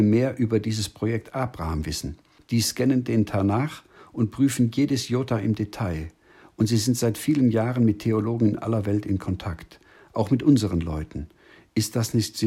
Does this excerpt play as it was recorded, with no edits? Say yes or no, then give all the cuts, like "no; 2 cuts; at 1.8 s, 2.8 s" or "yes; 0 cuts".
yes; 0 cuts